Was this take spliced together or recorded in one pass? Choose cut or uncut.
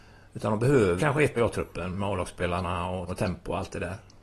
cut